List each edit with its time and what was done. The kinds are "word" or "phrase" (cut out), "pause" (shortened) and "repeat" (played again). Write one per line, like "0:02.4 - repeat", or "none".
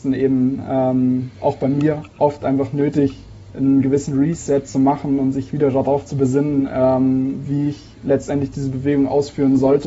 none